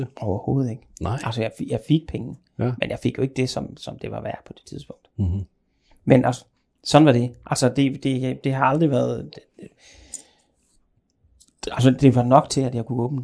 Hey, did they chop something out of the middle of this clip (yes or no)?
no